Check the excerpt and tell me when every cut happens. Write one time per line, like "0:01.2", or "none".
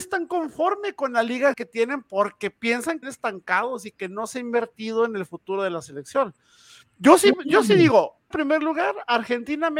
0:01.5
0:03.0
0:08.3